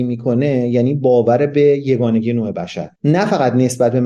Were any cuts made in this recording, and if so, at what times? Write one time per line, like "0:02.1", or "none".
0:03.0

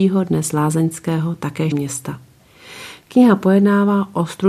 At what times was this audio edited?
0:01.7

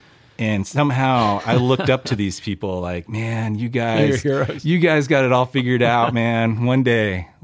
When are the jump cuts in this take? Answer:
none

